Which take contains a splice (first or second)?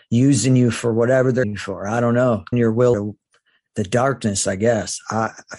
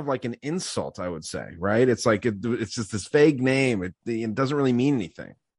first